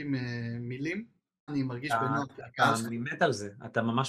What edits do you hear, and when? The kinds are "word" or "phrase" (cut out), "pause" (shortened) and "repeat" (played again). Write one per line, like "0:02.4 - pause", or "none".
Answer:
0:01.5 - word
0:02.9 - word